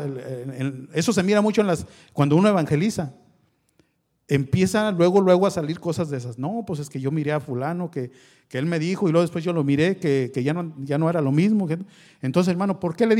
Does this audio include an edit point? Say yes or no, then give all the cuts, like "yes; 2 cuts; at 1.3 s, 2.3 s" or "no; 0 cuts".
no; 0 cuts